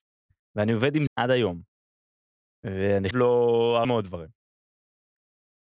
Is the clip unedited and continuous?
no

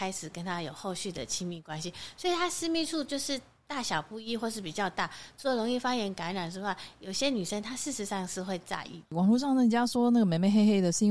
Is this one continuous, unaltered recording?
yes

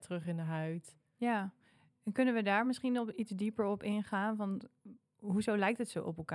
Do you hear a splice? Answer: no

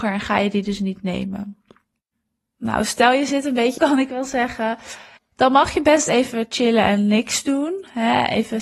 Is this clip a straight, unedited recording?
no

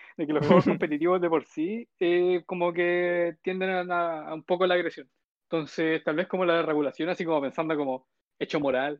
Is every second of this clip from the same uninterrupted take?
no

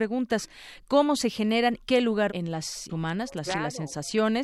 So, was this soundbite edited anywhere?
yes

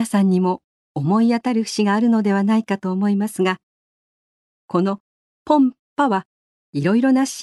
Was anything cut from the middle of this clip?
no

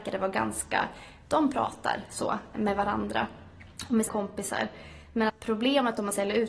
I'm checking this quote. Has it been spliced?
yes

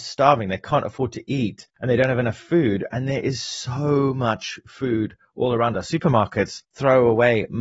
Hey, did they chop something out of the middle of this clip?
no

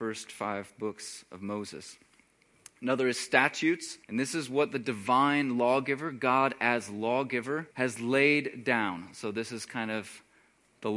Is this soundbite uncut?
no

